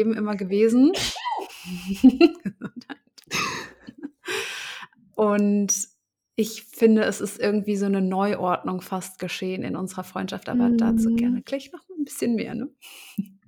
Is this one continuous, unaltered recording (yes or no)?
yes